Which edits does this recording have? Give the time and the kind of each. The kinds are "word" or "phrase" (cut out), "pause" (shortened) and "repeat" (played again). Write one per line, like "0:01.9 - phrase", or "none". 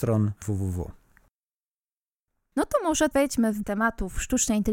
0:03.1 - word
0:03.6 - word